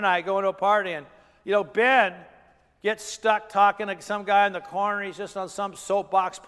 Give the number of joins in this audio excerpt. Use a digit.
0